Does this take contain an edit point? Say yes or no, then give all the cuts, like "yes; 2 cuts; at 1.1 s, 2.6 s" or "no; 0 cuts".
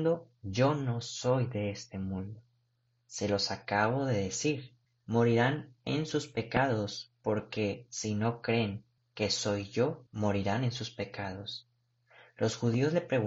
yes; 4 cuts; at 2.8 s, 4.8 s, 9.0 s, 10.1 s